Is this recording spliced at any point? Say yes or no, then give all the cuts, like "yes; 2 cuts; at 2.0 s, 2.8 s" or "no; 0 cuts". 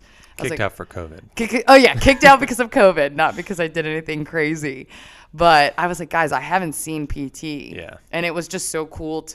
no; 0 cuts